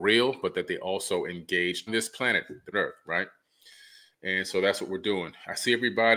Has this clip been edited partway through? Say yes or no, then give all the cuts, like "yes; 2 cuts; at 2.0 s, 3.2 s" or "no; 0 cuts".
yes; 2 cuts; at 1.9 s, 2.7 s